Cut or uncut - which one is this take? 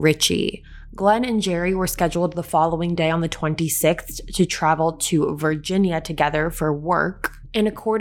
uncut